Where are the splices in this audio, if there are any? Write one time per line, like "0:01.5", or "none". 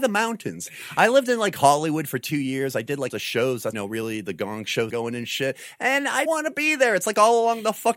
0:03.1
0:03.7
0:04.9
0:06.3